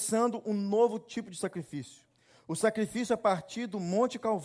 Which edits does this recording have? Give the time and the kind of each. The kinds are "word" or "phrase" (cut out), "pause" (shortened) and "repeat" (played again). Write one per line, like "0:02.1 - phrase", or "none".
none